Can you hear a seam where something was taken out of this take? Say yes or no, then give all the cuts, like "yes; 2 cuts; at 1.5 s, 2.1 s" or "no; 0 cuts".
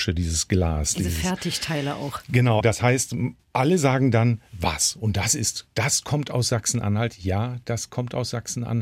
yes; 1 cut; at 2.6 s